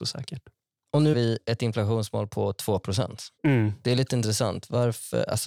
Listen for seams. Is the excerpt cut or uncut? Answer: cut